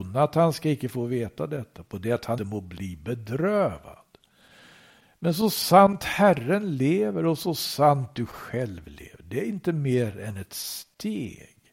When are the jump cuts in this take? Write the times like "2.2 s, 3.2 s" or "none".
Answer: 2.4 s